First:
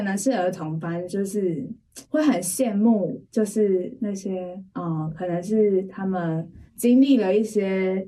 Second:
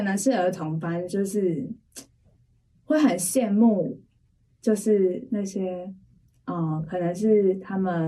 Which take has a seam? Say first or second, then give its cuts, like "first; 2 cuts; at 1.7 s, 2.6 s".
first; 4 cuts; at 2.0 s, 3.2 s, 4.7 s, 6.7 s